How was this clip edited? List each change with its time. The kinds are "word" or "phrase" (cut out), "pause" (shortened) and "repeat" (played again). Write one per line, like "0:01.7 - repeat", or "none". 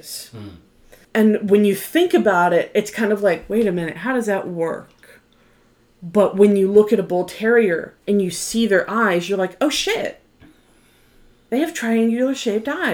0:01.0 - pause
0:08.0 - pause

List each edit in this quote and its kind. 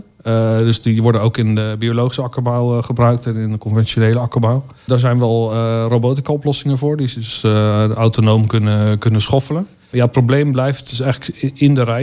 0:04.8 - pause

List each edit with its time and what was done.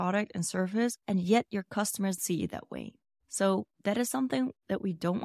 0:01.0 - pause
0:02.2 - word
0:03.0 - pause

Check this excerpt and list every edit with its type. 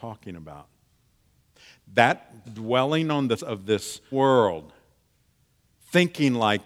0:02.4 - word
0:03.4 - word
0:04.1 - word

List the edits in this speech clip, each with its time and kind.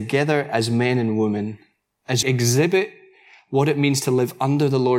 0:02.2 - word

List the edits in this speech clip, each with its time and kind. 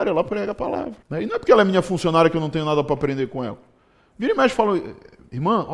0:01.0 - pause

